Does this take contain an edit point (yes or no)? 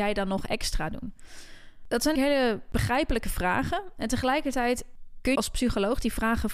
yes